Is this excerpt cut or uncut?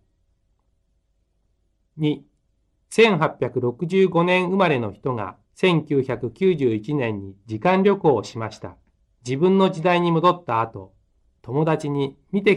cut